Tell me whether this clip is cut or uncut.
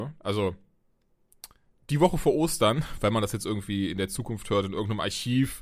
uncut